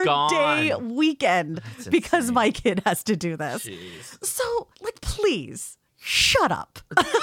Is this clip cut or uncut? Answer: cut